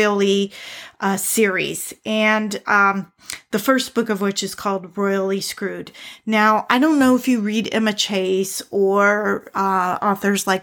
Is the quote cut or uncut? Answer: uncut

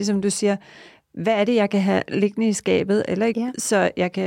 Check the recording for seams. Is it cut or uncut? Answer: cut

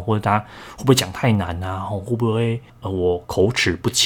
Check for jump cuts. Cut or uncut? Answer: cut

